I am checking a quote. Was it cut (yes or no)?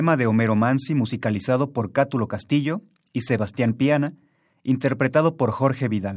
no